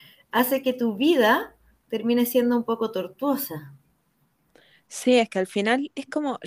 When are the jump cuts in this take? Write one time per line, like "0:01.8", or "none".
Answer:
none